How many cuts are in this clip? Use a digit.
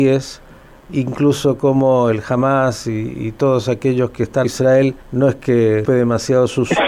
3